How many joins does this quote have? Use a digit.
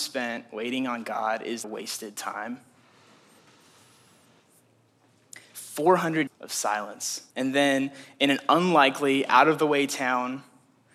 3